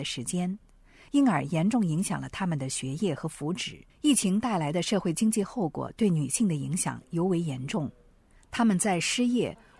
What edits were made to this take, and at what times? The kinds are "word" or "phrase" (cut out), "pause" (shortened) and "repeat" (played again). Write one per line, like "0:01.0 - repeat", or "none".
0:03.9 - pause